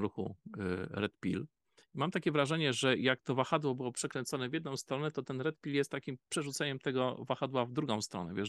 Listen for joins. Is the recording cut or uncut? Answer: uncut